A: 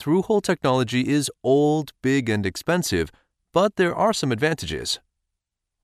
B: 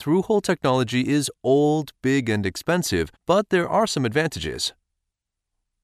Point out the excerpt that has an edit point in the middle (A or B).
B